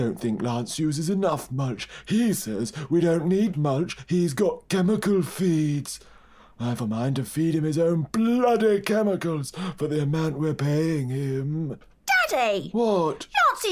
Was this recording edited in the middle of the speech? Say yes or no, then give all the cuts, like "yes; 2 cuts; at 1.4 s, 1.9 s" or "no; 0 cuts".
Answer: yes; 2 cuts; at 3.5 s, 6.8 s